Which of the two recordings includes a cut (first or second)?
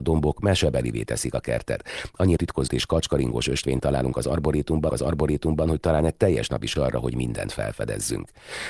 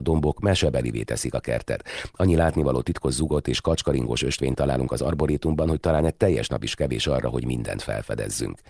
first